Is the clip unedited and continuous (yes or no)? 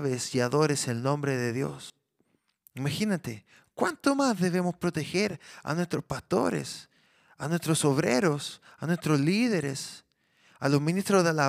yes